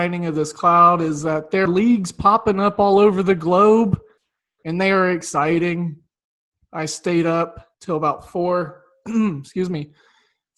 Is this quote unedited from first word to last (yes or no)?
no